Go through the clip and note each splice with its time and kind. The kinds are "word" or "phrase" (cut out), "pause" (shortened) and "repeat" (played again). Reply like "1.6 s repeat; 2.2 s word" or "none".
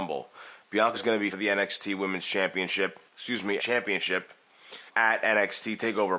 0.9 s word; 1.3 s phrase; 3.1 s pause; 3.6 s word; 4.9 s word